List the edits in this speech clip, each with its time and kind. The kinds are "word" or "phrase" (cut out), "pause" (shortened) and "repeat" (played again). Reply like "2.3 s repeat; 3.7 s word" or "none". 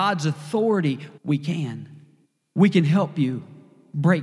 1.2 s pause; 2.2 s pause